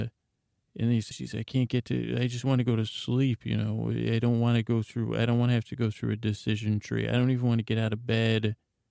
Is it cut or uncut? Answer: cut